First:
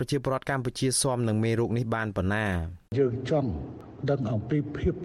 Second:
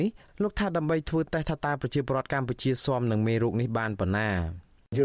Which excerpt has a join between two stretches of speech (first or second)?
first